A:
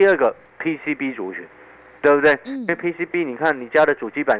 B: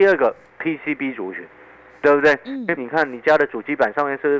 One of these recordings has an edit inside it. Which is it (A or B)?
B